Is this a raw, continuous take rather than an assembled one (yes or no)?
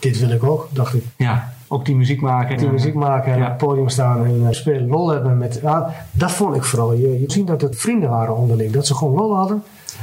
no